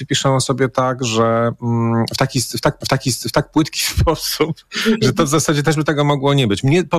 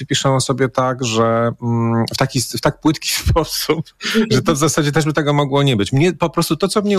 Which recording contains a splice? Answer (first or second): first